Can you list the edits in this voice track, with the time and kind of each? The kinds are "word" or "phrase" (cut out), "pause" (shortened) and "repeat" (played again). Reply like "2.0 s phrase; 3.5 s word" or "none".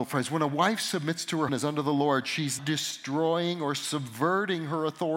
1.5 s word; 2.6 s word